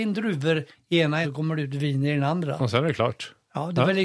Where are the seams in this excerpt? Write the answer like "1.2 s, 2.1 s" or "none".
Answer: 1.2 s